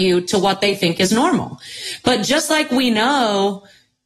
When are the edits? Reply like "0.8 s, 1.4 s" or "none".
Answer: none